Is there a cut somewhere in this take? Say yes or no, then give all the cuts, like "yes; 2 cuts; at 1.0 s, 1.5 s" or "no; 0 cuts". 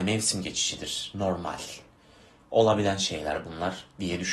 no; 0 cuts